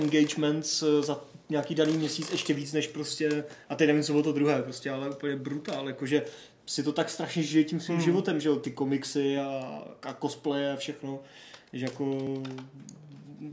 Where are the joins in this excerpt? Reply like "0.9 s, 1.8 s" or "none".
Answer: none